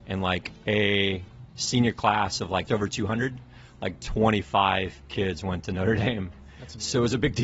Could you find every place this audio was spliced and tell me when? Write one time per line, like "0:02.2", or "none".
0:02.7